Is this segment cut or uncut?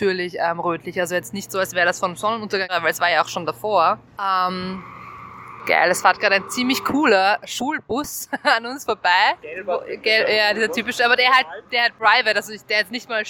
cut